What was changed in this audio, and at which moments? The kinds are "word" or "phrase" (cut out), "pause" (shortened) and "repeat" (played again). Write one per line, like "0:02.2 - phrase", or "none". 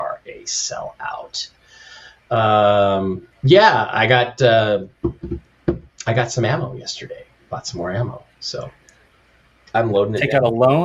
0:03.3 - pause